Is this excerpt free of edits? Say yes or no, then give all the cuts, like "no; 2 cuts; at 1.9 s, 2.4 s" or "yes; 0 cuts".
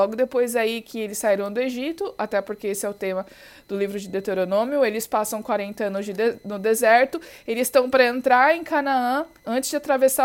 yes; 0 cuts